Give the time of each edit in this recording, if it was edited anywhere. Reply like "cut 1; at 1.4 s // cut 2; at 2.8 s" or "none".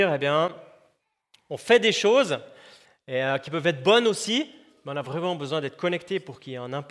none